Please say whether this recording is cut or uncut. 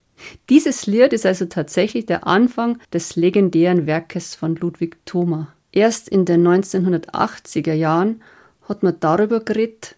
cut